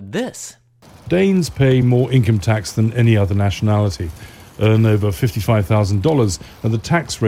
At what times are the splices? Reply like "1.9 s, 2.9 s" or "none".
none